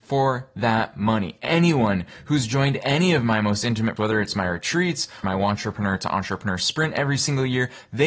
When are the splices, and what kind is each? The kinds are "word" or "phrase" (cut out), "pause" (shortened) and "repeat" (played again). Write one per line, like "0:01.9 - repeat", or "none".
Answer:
0:04.0 - word
0:05.2 - word